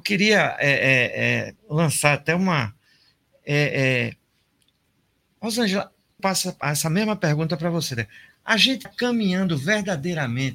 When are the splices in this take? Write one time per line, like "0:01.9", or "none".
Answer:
0:01.6
0:06.2
0:06.6
0:08.8

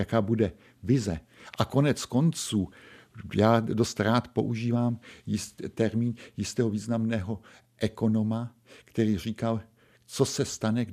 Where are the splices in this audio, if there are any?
none

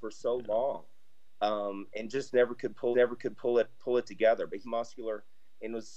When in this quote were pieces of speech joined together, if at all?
0:02.9
0:04.6

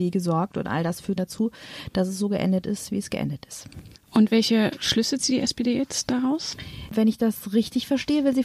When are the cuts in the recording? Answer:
0:01.2

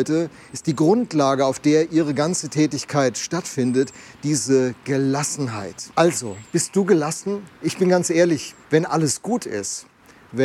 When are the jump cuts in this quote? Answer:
0:05.9
0:07.5
0:08.6

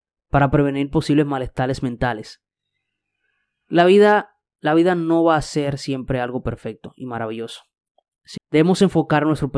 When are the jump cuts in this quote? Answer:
0:08.4

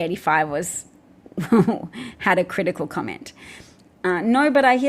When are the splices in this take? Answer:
none

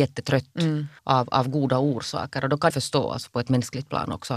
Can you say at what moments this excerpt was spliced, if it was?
0:01.0
0:02.7

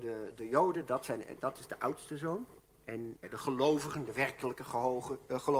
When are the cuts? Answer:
0:03.2

